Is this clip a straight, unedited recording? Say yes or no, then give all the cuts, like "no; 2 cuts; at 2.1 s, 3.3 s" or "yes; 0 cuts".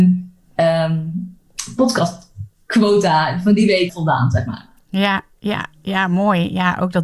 no; 1 cut; at 3.9 s